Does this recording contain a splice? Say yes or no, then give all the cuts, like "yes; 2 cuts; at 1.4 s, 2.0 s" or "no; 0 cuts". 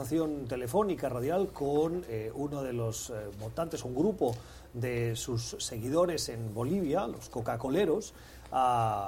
no; 0 cuts